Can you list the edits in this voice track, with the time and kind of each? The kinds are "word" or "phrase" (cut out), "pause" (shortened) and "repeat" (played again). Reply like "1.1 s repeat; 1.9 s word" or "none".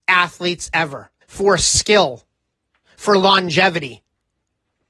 1.2 s pause; 2.5 s pause